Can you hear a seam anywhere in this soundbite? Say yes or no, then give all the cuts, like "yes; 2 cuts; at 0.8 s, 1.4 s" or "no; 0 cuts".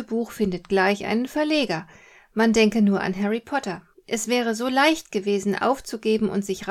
yes; 1 cut; at 3.9 s